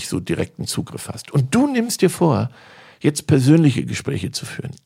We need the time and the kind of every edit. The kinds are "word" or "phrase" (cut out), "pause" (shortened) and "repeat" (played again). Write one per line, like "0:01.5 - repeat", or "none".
none